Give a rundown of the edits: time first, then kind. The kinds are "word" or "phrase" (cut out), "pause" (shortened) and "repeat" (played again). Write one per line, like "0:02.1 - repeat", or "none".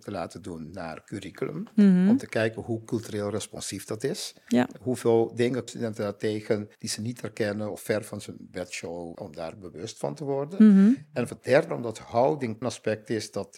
0:05.7 - word
0:06.7 - pause
0:09.1 - phrase
0:11.3 - word
0:11.7 - word
0:12.6 - phrase